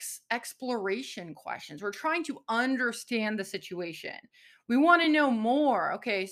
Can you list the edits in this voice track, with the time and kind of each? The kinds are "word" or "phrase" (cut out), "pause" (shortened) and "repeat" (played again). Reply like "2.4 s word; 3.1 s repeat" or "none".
none

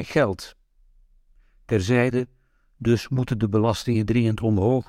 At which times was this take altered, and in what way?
none

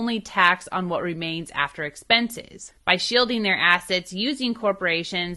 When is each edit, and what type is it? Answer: none

